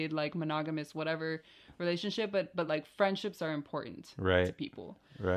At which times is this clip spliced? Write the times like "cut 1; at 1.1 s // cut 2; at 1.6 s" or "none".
none